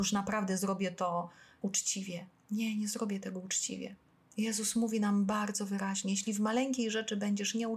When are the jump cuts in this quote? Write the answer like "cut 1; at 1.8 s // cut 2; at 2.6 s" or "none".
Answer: none